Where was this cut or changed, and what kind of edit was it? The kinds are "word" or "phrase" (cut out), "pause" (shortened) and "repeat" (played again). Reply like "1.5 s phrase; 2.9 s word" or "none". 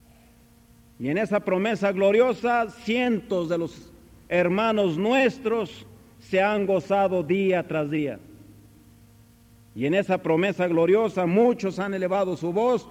none